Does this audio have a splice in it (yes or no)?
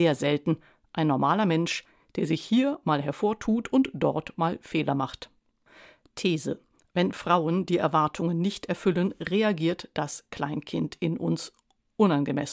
no